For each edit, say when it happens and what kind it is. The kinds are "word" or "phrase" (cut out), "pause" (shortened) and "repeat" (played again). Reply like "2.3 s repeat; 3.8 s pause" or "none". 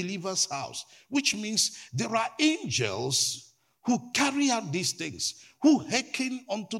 none